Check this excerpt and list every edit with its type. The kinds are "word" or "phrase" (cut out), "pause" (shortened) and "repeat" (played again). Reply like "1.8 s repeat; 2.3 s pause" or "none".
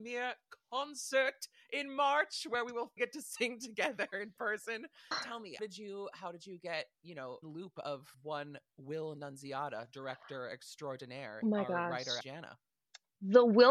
3.0 s word; 5.1 s word; 5.6 s word; 6.9 s word; 7.4 s word; 8.1 s word; 11.4 s word; 12.2 s word